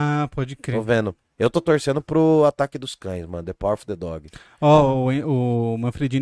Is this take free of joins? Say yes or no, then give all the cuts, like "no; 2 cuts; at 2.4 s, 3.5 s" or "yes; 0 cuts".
yes; 0 cuts